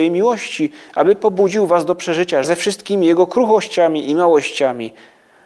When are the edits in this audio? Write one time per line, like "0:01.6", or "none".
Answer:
0:02.4